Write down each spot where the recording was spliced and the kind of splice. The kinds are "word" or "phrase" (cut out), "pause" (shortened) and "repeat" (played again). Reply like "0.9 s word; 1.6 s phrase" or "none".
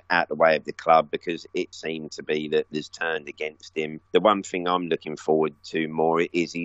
1.7 s word; 2.7 s phrase; 4.1 s pause